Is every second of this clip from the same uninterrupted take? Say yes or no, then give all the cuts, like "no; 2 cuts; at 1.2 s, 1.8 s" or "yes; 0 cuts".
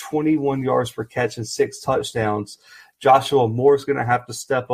yes; 0 cuts